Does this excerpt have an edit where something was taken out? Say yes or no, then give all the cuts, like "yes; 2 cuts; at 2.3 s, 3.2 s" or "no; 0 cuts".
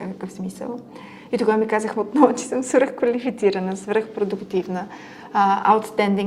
no; 0 cuts